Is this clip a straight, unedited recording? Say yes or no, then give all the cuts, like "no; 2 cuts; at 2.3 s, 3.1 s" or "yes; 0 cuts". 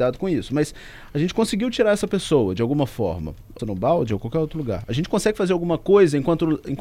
no; 1 cut; at 3.6 s